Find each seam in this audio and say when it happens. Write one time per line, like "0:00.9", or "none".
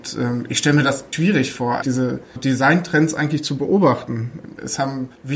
0:01.1
0:01.8
0:02.4